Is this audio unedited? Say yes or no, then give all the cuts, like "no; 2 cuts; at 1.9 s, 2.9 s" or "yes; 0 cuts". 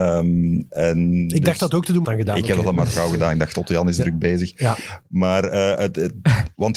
no; 1 cut; at 2.0 s